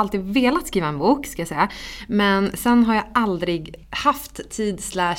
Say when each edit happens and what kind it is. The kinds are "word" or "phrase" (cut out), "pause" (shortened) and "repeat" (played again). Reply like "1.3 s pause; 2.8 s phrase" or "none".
3.8 s pause